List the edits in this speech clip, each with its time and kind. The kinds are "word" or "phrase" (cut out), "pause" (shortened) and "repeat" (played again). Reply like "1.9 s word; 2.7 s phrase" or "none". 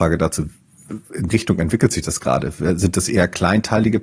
1.3 s word

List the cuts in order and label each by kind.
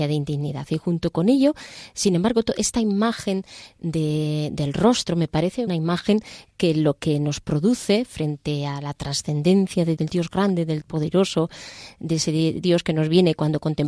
5.7 s word; 10.0 s word; 10.8 s word; 12.6 s word

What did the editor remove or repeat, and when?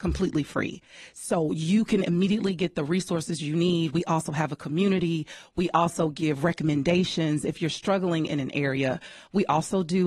none

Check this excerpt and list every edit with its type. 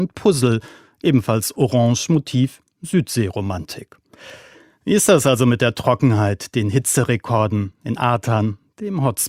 none

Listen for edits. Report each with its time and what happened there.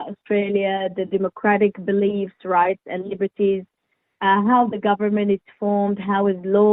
none

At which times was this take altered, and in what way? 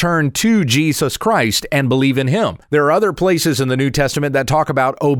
2.6 s pause

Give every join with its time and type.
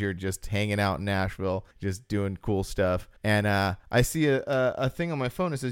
1.7 s pause; 3.2 s pause; 3.8 s pause

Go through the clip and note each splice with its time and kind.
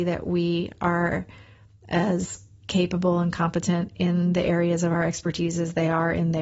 none

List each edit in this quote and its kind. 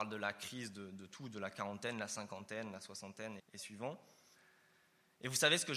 3.4 s word

